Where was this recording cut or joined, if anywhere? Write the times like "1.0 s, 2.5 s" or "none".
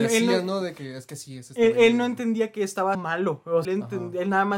2.9 s, 3.6 s